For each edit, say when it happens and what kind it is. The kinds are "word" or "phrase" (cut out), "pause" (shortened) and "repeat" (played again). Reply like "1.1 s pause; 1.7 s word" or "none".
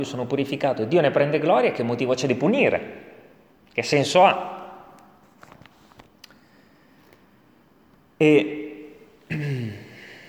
none